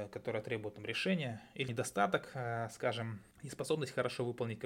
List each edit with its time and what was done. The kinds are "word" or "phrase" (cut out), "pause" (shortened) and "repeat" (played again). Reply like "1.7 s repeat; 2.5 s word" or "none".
1.7 s word; 3.3 s pause